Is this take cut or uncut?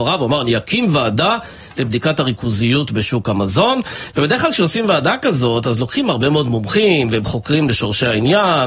uncut